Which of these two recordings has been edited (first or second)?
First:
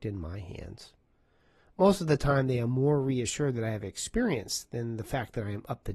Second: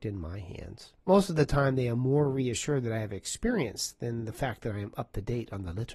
second